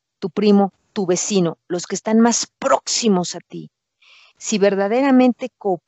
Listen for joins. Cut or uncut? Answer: uncut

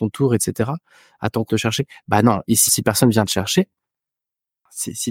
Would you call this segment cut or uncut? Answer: cut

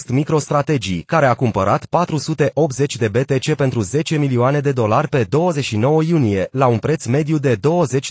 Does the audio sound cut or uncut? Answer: uncut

